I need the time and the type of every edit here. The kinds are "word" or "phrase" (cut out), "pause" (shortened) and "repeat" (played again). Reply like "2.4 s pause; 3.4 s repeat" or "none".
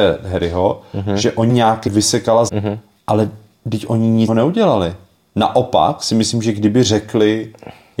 1.5 s word; 1.9 s word; 2.5 s word; 4.3 s word

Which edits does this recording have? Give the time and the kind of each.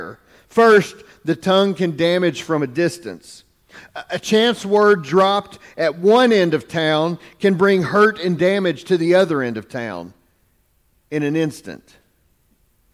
none

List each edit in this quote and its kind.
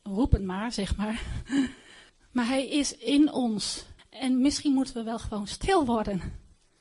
2.1 s pause; 4.0 s pause

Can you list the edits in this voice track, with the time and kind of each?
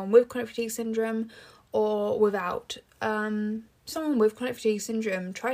3.9 s phrase

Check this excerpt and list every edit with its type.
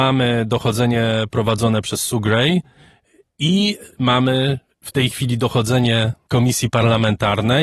3.9 s pause

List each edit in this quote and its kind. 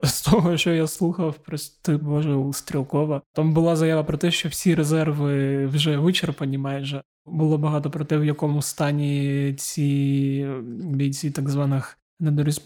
none

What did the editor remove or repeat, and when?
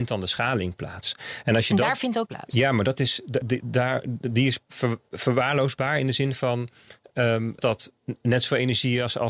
2.3 s word; 7.6 s word

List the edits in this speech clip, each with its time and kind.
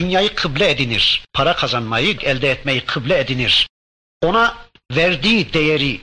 1.3 s pause; 2.2 s word

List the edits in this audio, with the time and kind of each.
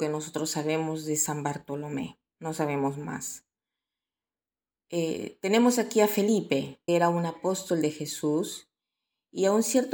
6.9 s word

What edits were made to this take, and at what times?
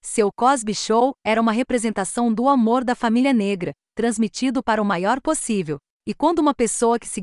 5.2 s word

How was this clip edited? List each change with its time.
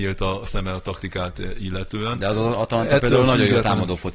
none

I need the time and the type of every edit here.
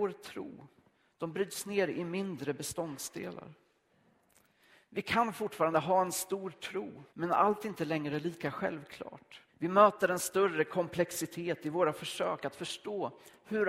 7.1 s pause; 9.5 s pause

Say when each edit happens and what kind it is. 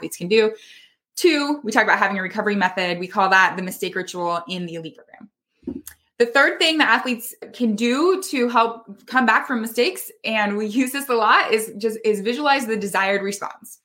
4.9 s word

